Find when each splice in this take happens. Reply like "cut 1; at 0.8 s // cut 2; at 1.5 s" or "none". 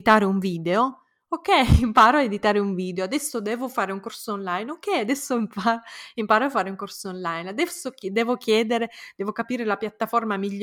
none